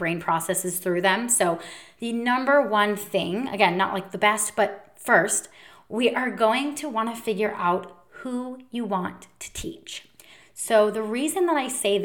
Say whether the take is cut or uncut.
uncut